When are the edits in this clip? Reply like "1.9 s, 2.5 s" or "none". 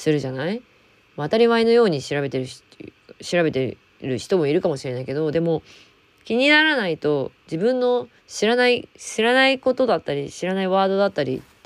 8.2 s